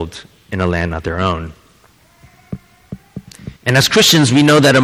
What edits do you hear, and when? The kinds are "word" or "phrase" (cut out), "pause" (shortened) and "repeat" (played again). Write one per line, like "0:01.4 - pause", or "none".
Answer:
0:03.6 - pause